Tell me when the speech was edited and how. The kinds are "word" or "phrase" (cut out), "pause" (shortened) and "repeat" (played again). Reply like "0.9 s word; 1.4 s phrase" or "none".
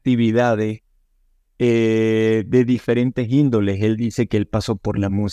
none